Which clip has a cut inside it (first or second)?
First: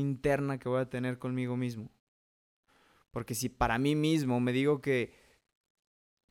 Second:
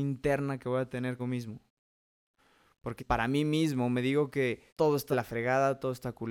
second